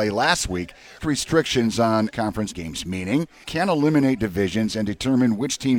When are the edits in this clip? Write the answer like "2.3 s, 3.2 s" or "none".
1.0 s, 2.1 s, 2.5 s, 3.4 s

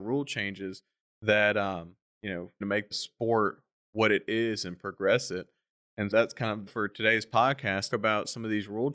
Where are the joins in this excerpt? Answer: 2.6 s, 2.9 s, 6.1 s, 6.7 s, 7.9 s

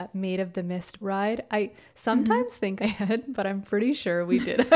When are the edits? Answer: 1.0 s, 2.8 s

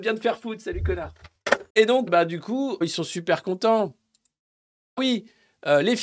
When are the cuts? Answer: 1.7 s, 2.1 s, 2.8 s, 5.0 s

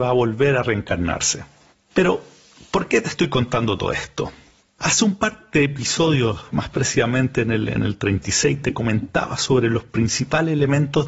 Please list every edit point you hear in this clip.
none

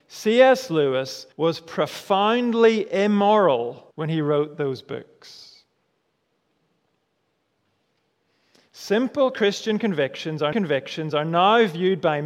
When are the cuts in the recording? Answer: 1.3 s, 3.9 s, 10.5 s

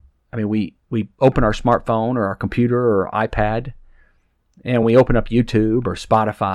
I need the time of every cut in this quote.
none

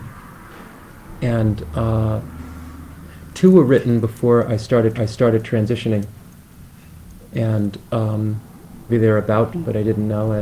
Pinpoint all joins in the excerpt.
4.9 s, 8.9 s, 9.5 s

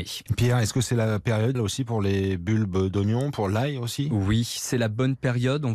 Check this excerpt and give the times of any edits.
1.5 s

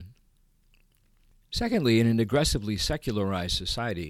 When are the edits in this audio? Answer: none

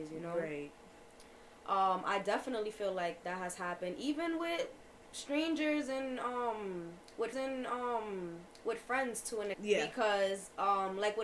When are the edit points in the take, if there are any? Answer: 7.3 s, 9.5 s

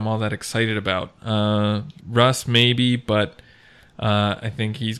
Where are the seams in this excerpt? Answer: 2.0 s

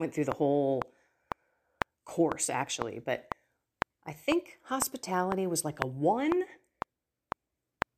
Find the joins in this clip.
none

